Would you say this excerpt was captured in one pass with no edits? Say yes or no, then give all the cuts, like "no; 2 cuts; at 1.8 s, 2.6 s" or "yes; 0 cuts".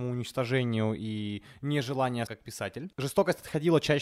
no; 1 cut; at 2.3 s